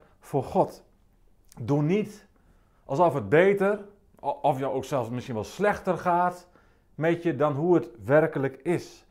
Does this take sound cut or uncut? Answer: uncut